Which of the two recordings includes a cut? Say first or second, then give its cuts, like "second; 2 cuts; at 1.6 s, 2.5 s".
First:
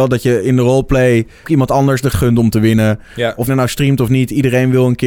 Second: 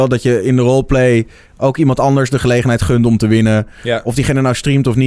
first; 3 cuts; at 1.4 s, 2.1 s, 3.5 s